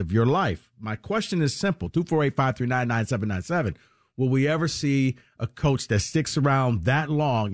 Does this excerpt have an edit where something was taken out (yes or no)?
no